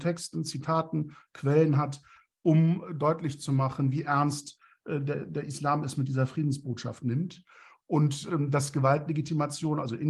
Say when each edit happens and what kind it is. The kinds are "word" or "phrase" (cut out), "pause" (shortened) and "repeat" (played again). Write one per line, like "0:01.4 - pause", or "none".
none